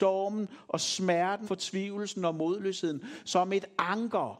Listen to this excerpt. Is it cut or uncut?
cut